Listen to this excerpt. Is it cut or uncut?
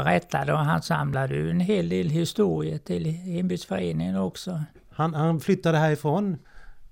cut